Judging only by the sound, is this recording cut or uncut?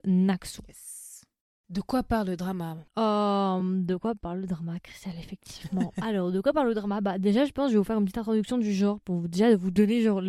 uncut